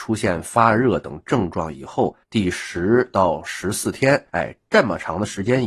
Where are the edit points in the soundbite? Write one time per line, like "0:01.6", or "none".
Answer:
0:02.2
0:04.3